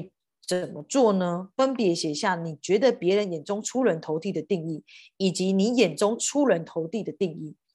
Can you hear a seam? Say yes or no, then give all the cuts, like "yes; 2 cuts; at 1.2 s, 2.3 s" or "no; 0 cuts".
no; 0 cuts